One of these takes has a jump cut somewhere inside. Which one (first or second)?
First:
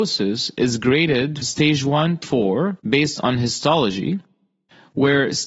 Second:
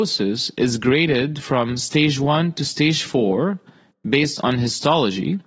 first